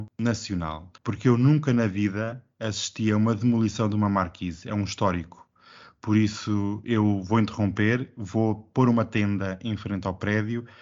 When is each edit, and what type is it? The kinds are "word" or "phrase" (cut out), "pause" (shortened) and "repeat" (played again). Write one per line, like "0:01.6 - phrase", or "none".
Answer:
0:01.0 - pause